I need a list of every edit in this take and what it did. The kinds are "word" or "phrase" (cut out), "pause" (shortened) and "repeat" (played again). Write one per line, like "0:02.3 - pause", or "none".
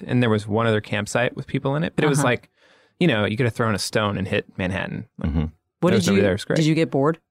none